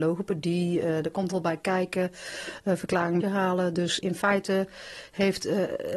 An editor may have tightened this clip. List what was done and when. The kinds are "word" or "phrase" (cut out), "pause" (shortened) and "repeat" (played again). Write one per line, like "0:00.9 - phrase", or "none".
0:01.3 - word
0:03.2 - phrase
0:04.0 - word